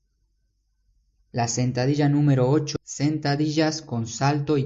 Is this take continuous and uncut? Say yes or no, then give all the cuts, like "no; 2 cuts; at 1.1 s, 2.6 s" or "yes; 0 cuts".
no; 1 cut; at 2.8 s